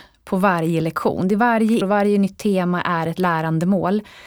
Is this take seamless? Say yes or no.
no